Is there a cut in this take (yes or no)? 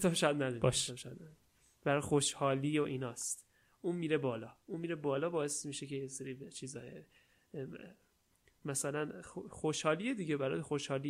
no